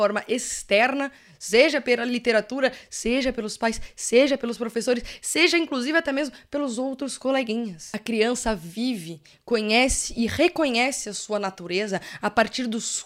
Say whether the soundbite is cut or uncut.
uncut